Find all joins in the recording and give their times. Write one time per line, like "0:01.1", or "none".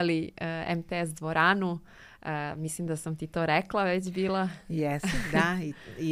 none

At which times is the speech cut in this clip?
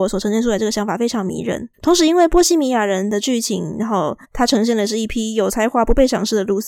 0:01.7
0:04.2

